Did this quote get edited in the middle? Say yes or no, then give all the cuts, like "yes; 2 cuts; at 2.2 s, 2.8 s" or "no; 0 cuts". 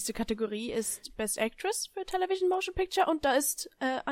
no; 0 cuts